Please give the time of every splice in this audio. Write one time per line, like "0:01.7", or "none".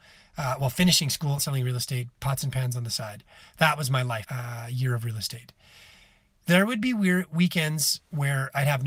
0:01.4
0:04.2